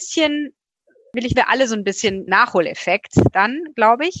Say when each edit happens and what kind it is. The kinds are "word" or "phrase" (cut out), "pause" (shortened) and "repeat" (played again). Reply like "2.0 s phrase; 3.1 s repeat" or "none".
1.3 s phrase; 2.3 s phrase